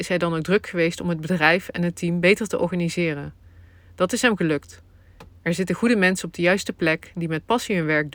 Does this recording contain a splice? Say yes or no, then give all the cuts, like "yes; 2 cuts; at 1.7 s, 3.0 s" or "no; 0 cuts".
no; 0 cuts